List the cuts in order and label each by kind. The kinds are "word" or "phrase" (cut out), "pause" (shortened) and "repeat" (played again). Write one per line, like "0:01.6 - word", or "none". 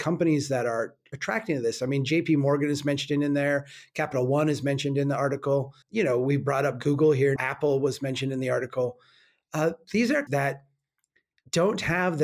0:05.8 - pause
0:07.4 - word
0:10.3 - word